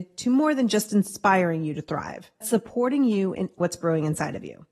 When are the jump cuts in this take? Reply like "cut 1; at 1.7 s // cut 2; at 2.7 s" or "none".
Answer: cut 1; at 2.4 s // cut 2; at 3.6 s